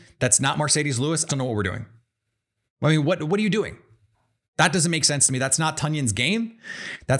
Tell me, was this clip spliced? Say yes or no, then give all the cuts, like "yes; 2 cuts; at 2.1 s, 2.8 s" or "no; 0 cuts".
yes; 1 cut; at 1.3 s